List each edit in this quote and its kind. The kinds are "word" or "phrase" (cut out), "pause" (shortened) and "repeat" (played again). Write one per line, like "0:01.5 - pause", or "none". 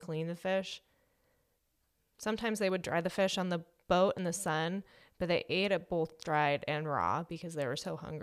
none